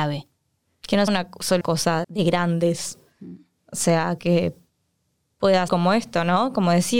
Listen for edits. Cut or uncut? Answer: cut